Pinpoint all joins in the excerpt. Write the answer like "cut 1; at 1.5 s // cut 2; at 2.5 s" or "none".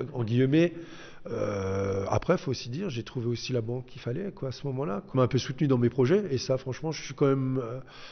cut 1; at 5.1 s